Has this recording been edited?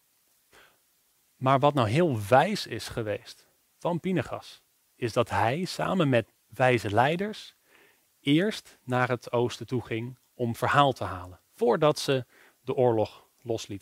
yes; 1 cut; at 6.4 s

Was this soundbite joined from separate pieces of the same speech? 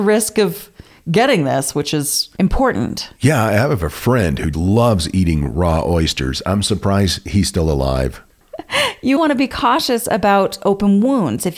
yes; 2 cuts; at 4.5 s, 9.2 s

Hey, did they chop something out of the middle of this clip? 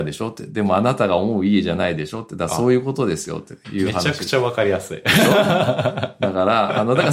no; 0 cuts

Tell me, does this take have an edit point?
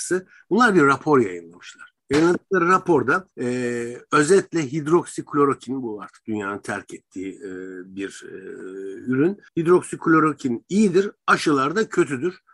yes; 3 cuts; at 2.0 s, 3.3 s, 9.5 s

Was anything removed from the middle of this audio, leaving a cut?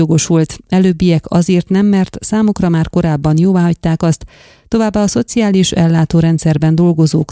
no; 0 cuts

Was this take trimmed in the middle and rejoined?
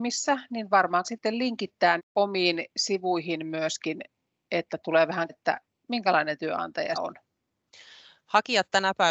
yes; 4 cuts; at 1.0 s, 2.0 s, 5.3 s, 6.9 s

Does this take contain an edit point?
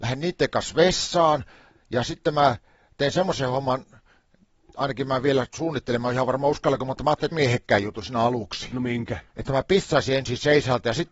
yes; 1 cut; at 7.3 s

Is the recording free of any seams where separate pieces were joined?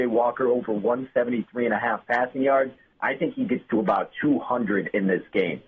yes; 0 cuts

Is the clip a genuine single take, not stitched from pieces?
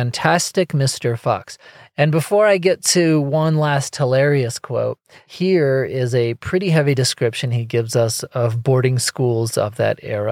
yes; 0 cuts

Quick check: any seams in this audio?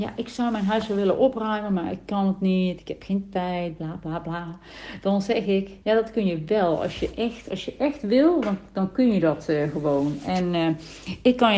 yes; 1 cut; at 5.8 s

